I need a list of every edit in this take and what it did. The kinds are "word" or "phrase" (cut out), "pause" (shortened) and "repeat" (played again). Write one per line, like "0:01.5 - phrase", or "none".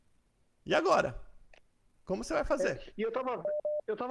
none